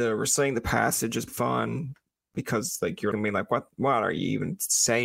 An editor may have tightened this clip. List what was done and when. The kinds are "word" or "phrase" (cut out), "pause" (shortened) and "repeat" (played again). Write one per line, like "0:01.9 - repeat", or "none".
0:01.3 - word
0:03.1 - word